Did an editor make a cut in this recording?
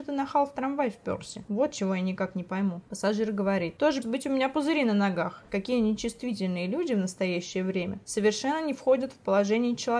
yes; 1 cut; at 4.0 s

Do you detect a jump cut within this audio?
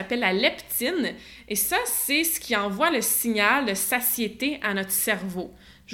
no; 0 cuts

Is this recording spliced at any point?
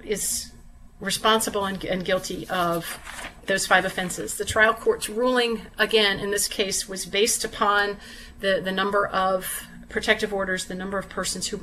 no; 0 cuts

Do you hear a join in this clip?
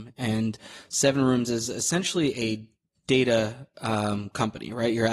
no; 0 cuts

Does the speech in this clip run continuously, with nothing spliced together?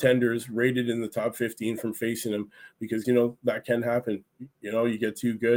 no; 1 cut; at 3.0 s

